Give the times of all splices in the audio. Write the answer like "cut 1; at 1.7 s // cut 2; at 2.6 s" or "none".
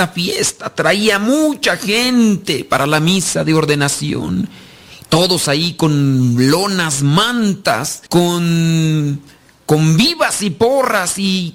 cut 1; at 8.1 s